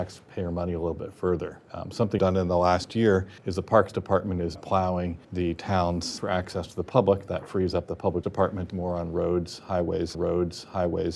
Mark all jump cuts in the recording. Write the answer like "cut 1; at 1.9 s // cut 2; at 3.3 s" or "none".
cut 1; at 1.6 s // cut 2; at 2.2 s // cut 3; at 3.4 s // cut 4; at 4.5 s // cut 5; at 5.2 s // cut 6; at 6.2 s // cut 7; at 8.2 s // cut 8; at 8.7 s // cut 9; at 10.1 s